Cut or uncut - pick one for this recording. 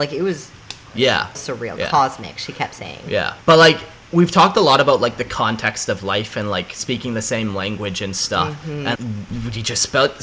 cut